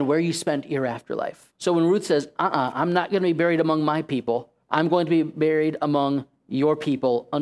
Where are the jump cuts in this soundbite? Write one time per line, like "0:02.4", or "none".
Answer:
0:01.6
0:04.6